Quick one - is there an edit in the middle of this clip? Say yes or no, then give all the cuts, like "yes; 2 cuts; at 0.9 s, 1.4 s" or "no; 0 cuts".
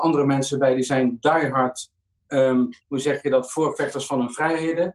yes; 1 cut; at 2.8 s